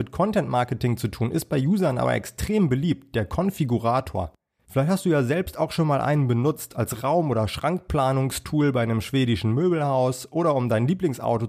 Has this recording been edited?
no; 0 cuts

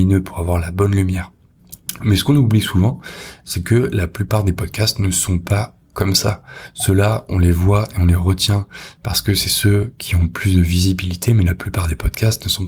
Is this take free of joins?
yes; 0 cuts

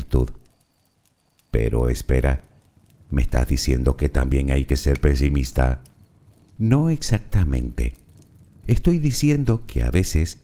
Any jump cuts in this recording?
no; 0 cuts

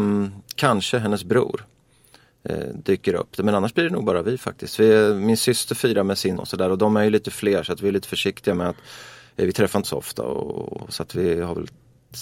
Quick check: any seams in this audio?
yes; 2 cuts; at 6.4 s, 9.8 s

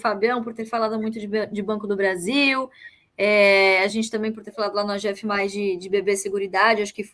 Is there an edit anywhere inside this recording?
no; 0 cuts

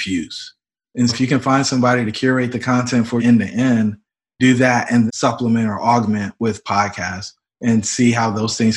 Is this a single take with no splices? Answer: no; 3 cuts; at 1.1 s, 3.2 s, 5.1 s

